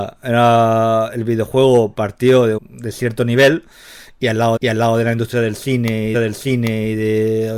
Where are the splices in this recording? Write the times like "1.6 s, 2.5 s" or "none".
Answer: 2.6 s, 4.6 s, 6.1 s